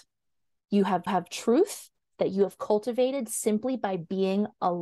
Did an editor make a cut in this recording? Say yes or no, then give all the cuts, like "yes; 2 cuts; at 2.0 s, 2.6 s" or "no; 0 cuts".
yes; 1 cut; at 1.1 s